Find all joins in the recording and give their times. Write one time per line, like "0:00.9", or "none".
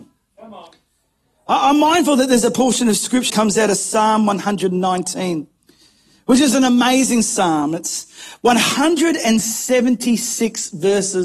0:03.3